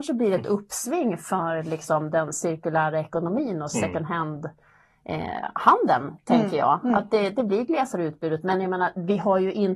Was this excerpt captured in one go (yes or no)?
yes